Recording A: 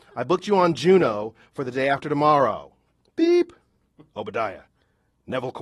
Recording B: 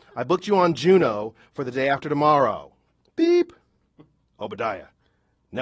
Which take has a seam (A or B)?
A